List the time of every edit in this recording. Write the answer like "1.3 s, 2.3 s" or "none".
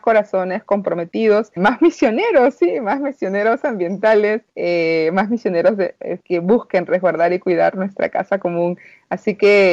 1.6 s, 4.5 s, 6.2 s